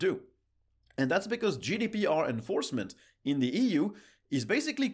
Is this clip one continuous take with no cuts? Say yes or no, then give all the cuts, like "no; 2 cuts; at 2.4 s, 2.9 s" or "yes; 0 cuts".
yes; 0 cuts